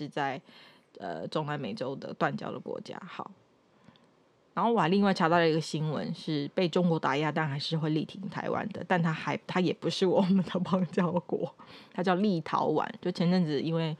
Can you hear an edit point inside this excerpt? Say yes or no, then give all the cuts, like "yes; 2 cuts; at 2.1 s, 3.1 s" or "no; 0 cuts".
yes; 1 cut; at 9.4 s